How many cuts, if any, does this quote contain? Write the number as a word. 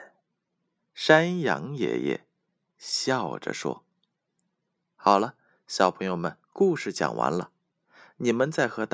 one